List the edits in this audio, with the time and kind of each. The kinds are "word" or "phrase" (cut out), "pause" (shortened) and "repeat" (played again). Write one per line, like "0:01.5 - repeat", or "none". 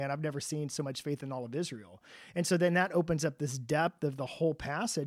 none